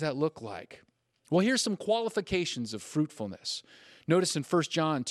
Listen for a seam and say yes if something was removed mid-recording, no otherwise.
no